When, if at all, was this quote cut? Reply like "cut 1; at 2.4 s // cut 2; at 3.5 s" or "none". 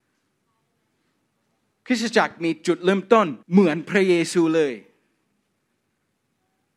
cut 1; at 3.4 s